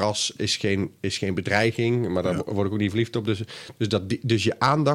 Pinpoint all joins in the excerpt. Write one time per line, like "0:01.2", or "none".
none